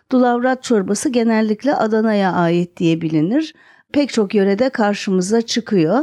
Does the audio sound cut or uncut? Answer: uncut